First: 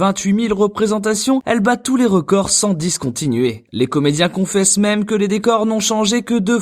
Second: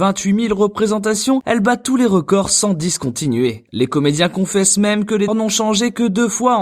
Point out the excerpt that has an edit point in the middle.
second; 1 cut; at 5.3 s

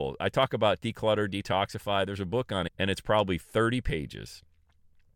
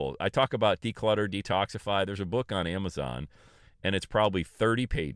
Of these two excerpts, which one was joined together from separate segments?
first; 1 cut; at 2.7 s

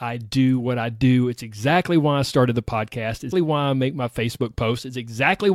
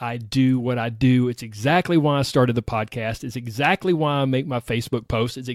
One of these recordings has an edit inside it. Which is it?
first; 1 cut; at 3.3 s

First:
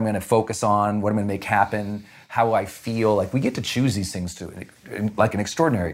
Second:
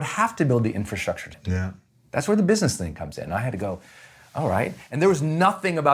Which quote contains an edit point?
second; 1 cut; at 1.3 s

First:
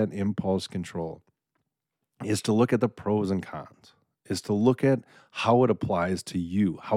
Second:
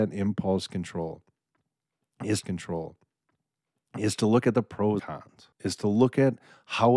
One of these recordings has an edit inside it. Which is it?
second; 3 cuts; at 2.4 s, 5.0 s, 5.5 s

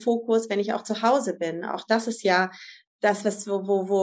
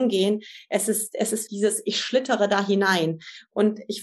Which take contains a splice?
second; 1 cut; at 1.5 s

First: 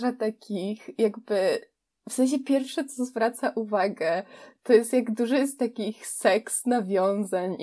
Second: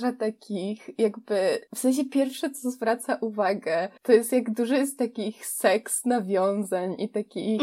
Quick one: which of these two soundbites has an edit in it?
second; 2 cuts; at 1.7 s, 4.0 s

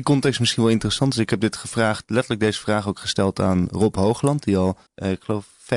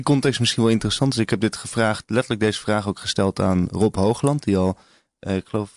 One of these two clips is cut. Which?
first; 1 cut; at 4.9 s

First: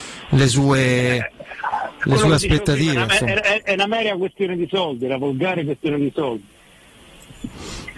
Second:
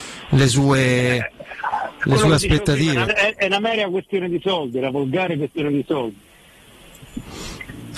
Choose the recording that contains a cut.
second; 1 cut; at 3.1 s

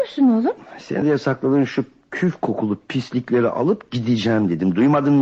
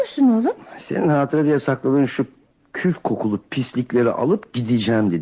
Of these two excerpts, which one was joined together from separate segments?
first; 2 cuts; at 1.0 s, 2.0 s

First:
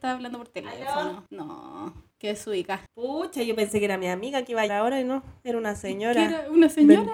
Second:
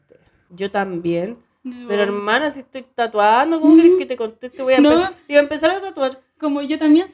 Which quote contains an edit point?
first; 4 cuts; at 1.3 s, 2.1 s, 2.9 s, 4.7 s

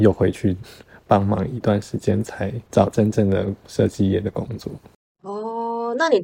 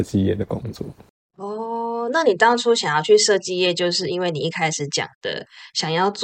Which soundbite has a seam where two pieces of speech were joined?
first; 1 cut; at 2.7 s

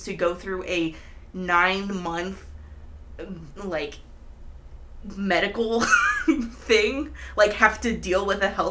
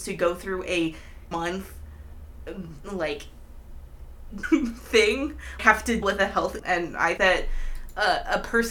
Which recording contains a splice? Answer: second; 6 cuts; at 1.3 s, 4.4 s, 5.6 s, 6.0 s, 6.6 s, 7.2 s

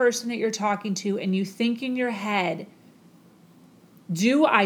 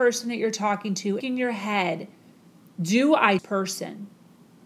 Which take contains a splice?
second; 3 cuts; at 1.2 s, 2.6 s, 3.4 s

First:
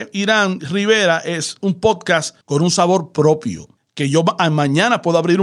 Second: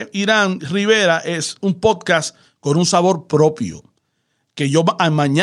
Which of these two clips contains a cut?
first; 2 cuts; at 2.4 s, 3.8 s

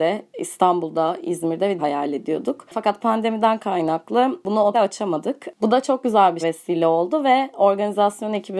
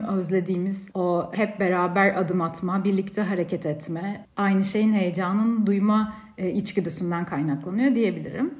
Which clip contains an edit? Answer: first; 3 cuts; at 1.8 s, 4.7 s, 6.4 s

